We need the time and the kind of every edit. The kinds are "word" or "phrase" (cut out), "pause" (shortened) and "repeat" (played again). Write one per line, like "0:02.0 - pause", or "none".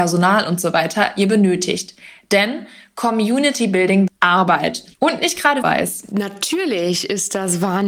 0:04.1 - word
0:04.9 - pause
0:05.6 - phrase